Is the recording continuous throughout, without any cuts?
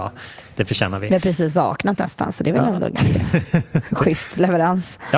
yes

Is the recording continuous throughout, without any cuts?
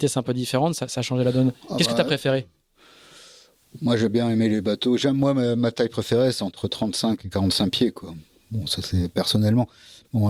yes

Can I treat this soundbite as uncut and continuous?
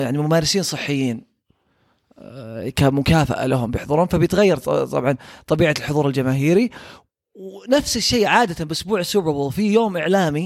yes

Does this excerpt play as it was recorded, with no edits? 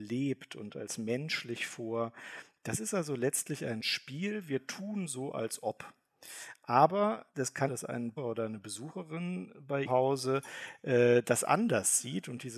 no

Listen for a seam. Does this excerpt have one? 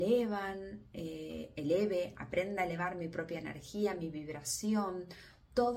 no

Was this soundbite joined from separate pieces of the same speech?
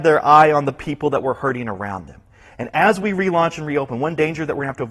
no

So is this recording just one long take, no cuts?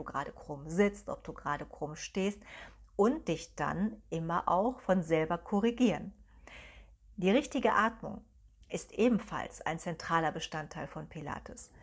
yes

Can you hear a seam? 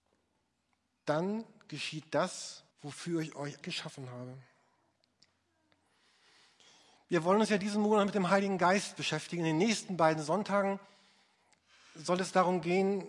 yes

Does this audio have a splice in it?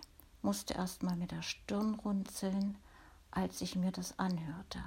no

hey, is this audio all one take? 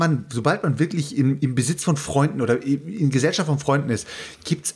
yes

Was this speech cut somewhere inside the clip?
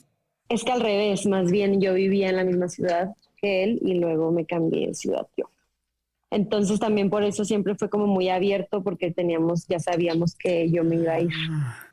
no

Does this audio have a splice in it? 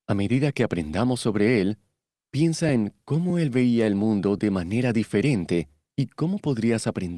no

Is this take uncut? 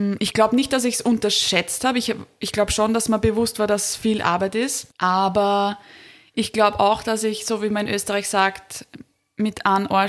no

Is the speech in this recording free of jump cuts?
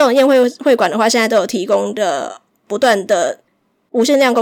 yes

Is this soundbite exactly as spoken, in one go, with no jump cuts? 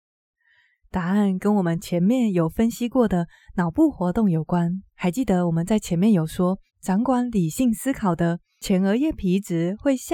no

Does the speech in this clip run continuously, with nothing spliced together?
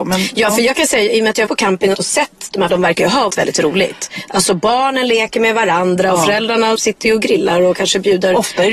no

